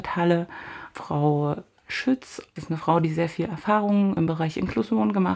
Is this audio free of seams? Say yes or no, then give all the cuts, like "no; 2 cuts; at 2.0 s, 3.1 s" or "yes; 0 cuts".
yes; 0 cuts